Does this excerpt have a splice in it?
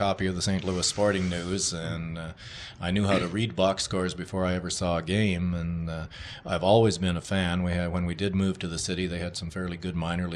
no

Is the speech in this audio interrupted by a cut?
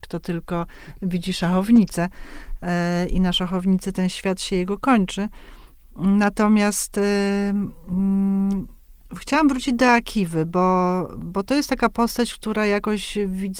no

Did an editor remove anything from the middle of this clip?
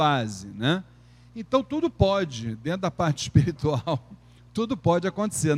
no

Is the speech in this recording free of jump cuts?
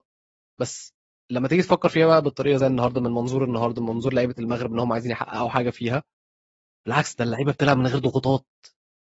yes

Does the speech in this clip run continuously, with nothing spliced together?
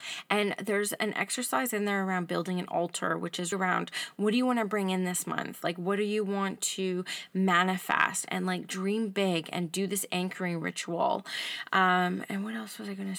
no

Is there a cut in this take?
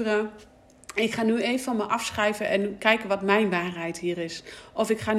no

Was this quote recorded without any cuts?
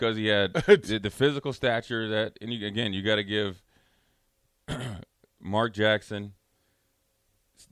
yes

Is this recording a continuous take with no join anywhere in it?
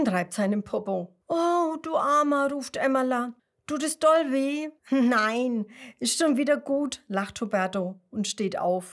no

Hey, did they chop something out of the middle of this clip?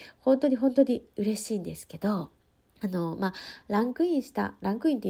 yes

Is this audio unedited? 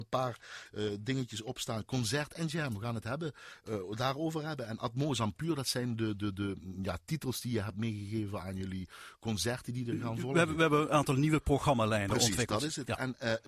yes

